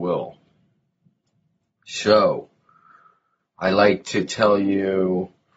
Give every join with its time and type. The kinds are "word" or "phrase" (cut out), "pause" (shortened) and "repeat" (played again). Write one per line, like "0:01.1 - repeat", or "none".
0:03.4 - word